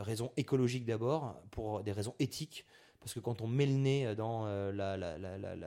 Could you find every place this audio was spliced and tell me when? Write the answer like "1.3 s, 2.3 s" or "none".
none

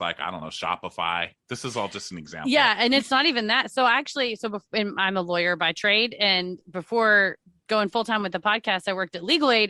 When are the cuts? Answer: none

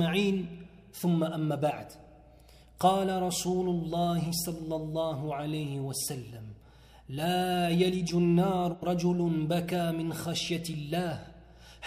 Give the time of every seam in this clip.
none

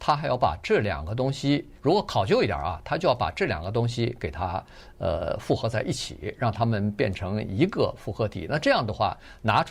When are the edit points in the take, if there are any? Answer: 1.8 s

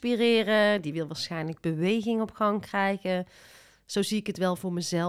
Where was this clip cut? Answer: none

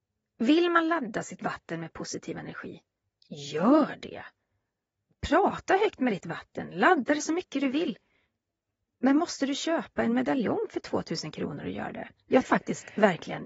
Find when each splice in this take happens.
12.4 s

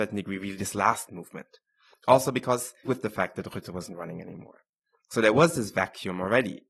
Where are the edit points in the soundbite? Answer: 1.1 s, 2.8 s

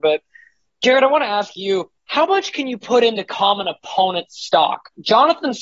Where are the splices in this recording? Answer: 2.0 s

